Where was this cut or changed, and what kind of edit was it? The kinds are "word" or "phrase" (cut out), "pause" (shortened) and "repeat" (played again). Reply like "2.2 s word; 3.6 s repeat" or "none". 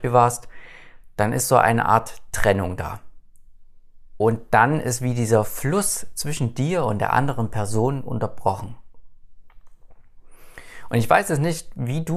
none

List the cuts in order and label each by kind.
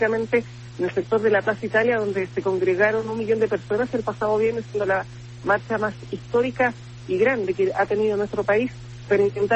none

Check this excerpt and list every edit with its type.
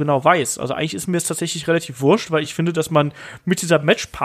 none

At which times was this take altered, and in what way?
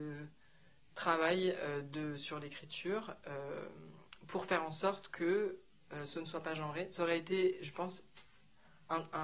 none

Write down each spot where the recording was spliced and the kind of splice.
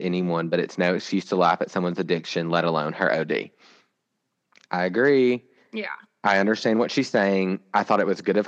none

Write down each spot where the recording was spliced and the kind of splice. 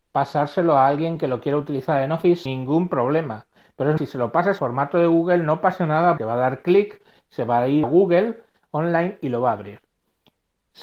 2.5 s word; 4.0 s word; 4.6 s word; 6.2 s word; 7.8 s word

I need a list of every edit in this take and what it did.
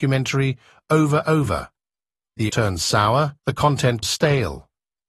1.2 s word; 2.5 s word; 3.4 s pause; 4.0 s word

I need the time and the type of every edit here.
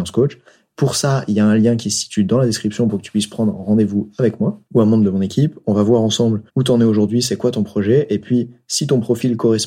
4.6 s pause; 6.5 s pause

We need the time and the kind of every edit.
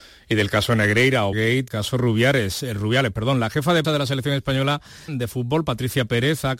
1.3 s word; 1.7 s word; 3.8 s word; 5.1 s word

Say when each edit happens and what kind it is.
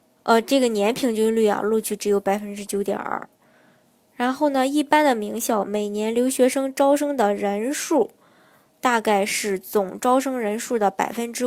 none

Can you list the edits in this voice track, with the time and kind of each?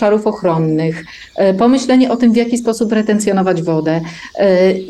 none

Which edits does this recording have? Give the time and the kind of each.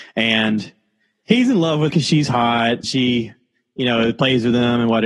1.9 s word; 2.8 s word

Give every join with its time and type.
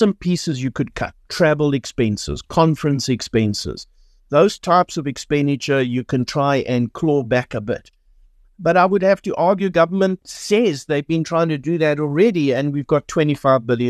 none

